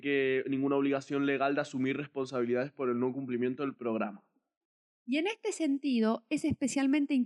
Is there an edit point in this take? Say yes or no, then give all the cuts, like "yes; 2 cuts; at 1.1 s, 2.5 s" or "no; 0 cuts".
no; 0 cuts